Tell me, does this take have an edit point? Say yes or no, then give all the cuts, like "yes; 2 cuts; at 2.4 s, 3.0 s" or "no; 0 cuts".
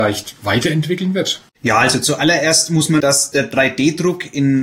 yes; 2 cuts; at 1.5 s, 3.0 s